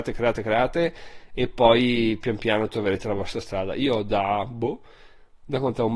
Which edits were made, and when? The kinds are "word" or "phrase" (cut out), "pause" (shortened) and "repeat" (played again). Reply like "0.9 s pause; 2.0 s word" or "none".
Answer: none